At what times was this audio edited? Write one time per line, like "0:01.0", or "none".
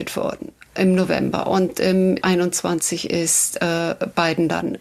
0:02.2